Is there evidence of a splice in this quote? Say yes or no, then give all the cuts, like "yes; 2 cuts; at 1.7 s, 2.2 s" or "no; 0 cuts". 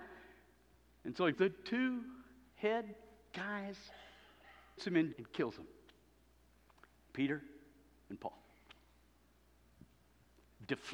yes; 3 cuts; at 1.3 s, 4.8 s, 5.1 s